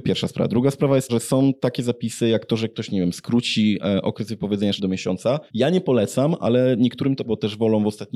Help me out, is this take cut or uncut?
cut